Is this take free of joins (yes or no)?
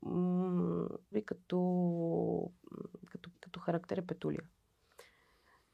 no